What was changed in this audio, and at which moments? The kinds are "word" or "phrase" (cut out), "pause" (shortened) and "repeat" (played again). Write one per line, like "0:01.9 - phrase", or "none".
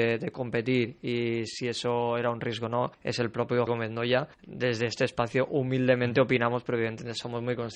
0:02.9 - pause
0:03.7 - word
0:04.3 - pause